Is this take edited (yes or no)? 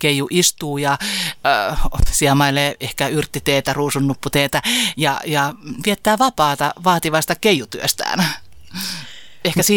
no